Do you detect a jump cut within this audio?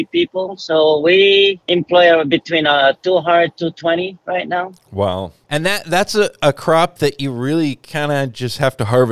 no; 0 cuts

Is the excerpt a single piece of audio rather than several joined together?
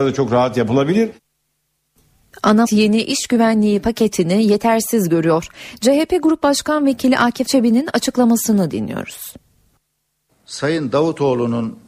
no; 2 cuts; at 2.6 s, 7.5 s

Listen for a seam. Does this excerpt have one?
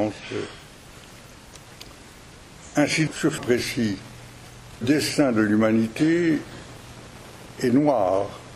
yes; 3 cuts; at 3.1 s, 3.4 s, 4.8 s

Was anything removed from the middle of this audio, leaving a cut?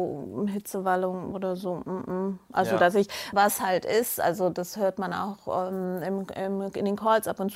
yes; 1 cut; at 3.3 s

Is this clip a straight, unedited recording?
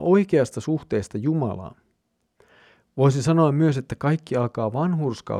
yes; 0 cuts

